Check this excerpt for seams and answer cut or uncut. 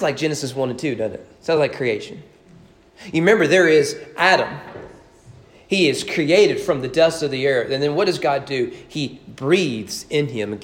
uncut